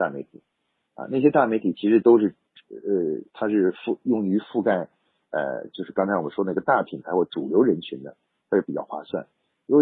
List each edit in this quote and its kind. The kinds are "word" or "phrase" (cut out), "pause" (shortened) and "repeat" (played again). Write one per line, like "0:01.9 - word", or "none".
0:03.3 - pause